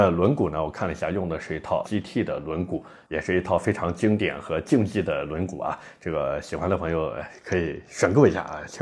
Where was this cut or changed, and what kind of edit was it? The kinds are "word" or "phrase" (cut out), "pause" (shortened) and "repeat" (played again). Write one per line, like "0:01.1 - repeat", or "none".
0:01.8 - word